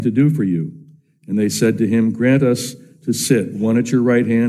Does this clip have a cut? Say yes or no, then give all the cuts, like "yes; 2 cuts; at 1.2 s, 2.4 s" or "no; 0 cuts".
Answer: no; 0 cuts